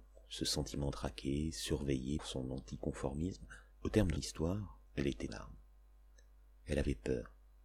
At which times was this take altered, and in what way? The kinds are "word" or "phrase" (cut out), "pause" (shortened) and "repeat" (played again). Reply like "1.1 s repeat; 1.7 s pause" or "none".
0.9 s word; 2.2 s word; 3.7 s pause; 4.2 s word; 4.9 s pause; 5.3 s word